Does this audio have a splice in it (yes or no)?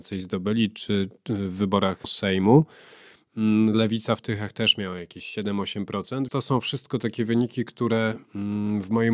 yes